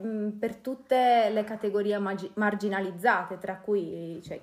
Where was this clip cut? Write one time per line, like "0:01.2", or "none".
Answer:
none